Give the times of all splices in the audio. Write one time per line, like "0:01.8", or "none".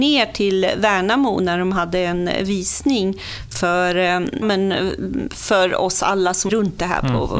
0:04.4
0:06.5

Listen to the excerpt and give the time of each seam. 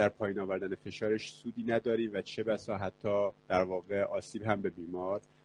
0:03.4

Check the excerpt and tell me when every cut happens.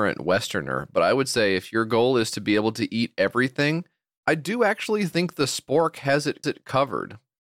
0:06.4

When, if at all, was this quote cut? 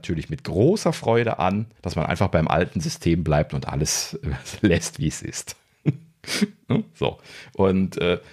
0:01.8

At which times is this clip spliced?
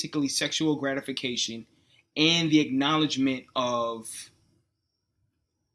none

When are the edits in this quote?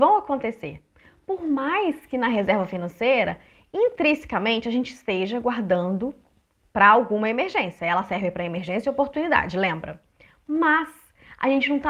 none

